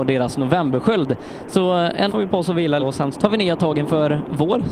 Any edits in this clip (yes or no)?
yes